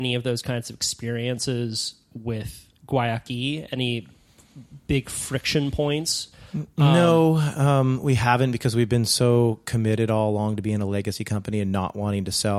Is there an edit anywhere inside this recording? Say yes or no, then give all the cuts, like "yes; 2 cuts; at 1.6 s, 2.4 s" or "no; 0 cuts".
no; 0 cuts